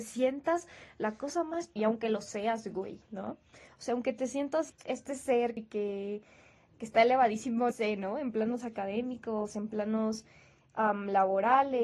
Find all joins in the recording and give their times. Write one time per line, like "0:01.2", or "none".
0:01.8
0:04.7
0:05.6
0:06.7
0:07.7